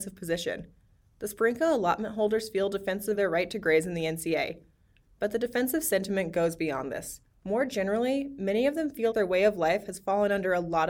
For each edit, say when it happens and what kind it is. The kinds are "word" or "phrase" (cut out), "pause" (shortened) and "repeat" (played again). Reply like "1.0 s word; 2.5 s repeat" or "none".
3.1 s word; 7.3 s pause; 9.1 s word